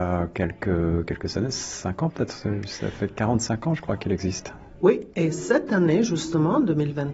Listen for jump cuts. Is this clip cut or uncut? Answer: cut